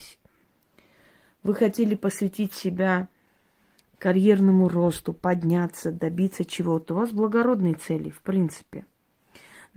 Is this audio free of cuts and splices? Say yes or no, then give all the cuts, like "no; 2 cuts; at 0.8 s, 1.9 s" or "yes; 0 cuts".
yes; 0 cuts